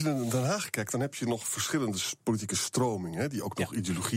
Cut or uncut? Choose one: uncut